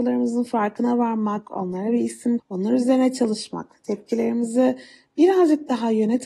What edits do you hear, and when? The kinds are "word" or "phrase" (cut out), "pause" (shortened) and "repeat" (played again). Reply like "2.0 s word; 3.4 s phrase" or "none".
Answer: 2.4 s word